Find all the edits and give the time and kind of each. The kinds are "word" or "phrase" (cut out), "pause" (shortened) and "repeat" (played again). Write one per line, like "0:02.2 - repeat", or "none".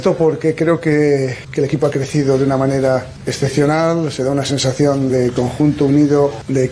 0:05.1 - word